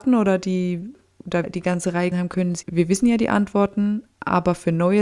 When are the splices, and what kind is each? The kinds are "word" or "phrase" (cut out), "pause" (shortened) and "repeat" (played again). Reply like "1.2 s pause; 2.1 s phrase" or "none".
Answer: 1.4 s word; 2.1 s word; 2.6 s word